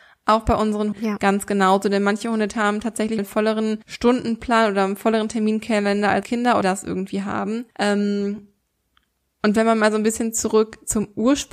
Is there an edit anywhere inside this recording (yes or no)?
yes